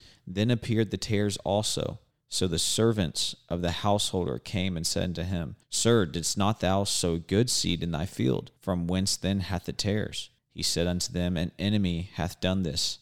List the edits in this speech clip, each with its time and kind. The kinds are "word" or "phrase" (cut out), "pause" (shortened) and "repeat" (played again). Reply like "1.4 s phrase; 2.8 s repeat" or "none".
2.1 s pause; 5.6 s pause; 8.6 s pause; 10.4 s pause